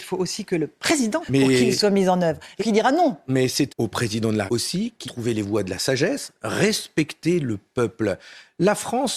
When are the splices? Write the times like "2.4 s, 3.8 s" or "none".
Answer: 1.2 s, 2.6 s, 3.7 s, 4.5 s, 5.0 s